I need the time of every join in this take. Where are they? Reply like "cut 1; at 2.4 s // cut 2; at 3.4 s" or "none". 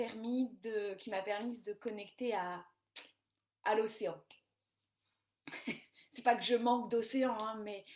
none